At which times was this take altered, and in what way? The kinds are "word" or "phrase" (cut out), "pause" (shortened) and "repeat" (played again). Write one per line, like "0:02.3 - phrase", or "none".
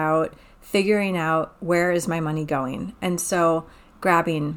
none